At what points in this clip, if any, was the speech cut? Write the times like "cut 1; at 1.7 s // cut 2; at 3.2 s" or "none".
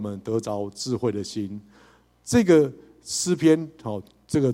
none